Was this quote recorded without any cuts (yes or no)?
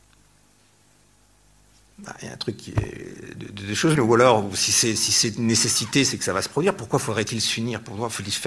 no